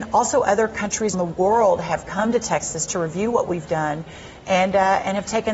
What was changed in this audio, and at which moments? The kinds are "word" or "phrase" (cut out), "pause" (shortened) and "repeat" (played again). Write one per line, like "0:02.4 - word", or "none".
0:01.1 - word